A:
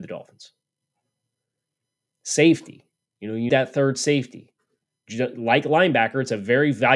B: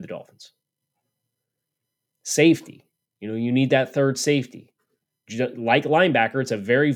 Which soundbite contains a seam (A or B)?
A